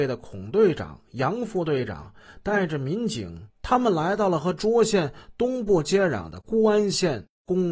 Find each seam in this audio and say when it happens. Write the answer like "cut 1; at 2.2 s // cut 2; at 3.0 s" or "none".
cut 1; at 3.5 s